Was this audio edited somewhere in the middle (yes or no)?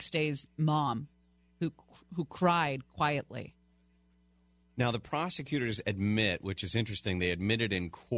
no